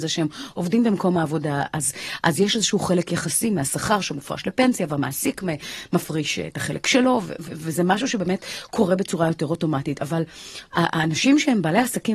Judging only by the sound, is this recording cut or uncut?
uncut